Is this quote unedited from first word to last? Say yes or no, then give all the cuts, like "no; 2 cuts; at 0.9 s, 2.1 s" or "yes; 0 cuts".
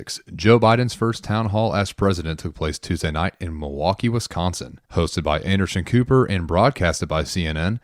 no; 1 cut; at 4.8 s